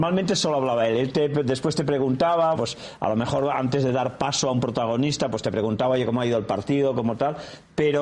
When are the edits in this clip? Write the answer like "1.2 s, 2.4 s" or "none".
2.5 s